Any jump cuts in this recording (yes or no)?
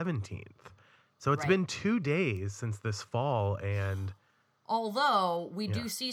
no